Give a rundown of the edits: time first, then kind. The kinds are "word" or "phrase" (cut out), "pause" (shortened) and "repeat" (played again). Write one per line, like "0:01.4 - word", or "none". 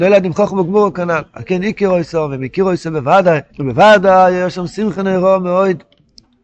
0:03.5 - pause